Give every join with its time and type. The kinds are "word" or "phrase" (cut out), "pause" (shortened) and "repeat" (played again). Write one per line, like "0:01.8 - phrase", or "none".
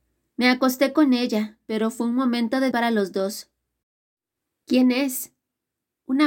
0:02.7 - word